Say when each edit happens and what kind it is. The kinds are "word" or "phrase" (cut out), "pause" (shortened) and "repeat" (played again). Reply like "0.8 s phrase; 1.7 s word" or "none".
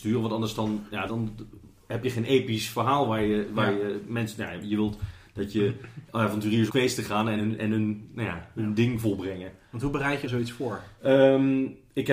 1.1 s word; 6.7 s word; 7.4 s word; 10.2 s word; 11.0 s pause